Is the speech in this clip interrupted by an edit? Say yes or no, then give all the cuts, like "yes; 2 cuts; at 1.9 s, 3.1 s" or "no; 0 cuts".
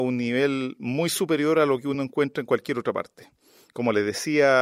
no; 0 cuts